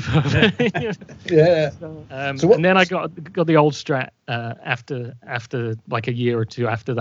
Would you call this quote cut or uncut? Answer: cut